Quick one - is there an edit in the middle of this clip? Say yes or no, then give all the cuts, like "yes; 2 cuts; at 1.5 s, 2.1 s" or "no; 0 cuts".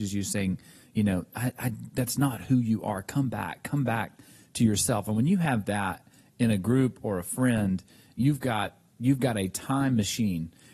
no; 0 cuts